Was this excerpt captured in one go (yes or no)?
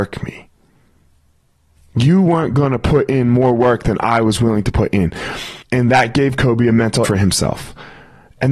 no